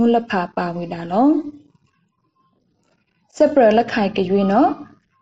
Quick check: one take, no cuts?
yes; 0 cuts

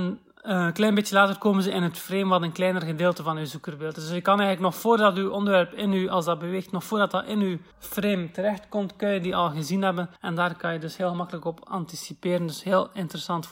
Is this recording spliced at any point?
yes; 2 cuts; at 7.7 s, 10.2 s

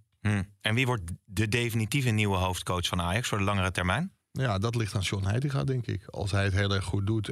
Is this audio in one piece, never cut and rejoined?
yes; 0 cuts

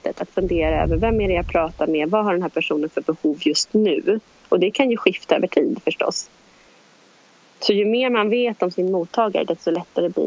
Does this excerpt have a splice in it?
no; 0 cuts

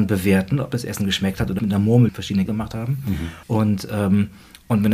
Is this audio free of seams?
no; 4 cuts; at 1.6 s, 2.1 s, 2.5 s, 3.4 s

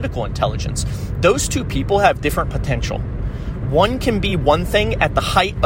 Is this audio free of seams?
yes; 0 cuts

